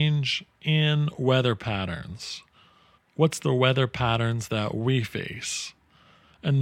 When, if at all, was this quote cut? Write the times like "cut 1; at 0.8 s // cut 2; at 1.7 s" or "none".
cut 1; at 3.0 s